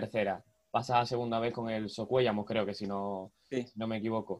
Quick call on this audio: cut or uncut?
uncut